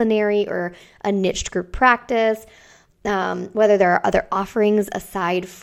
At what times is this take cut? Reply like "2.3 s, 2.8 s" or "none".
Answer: none